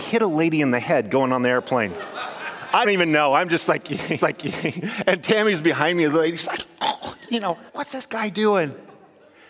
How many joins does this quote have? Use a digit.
3